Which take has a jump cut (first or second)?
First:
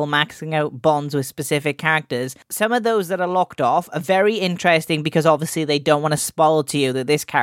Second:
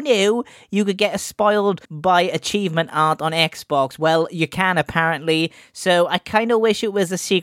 second